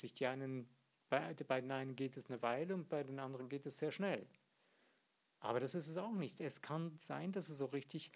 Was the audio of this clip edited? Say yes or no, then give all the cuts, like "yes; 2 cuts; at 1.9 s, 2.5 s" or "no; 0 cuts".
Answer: no; 0 cuts